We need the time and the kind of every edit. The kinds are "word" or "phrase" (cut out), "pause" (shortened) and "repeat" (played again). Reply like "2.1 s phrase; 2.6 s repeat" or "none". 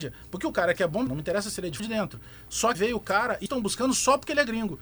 1.1 s word; 1.8 s word; 2.7 s word; 3.5 s word